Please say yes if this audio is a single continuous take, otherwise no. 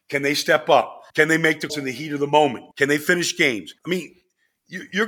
no